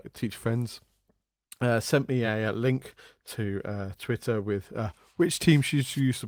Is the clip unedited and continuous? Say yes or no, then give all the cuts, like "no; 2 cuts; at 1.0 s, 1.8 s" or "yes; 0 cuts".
yes; 0 cuts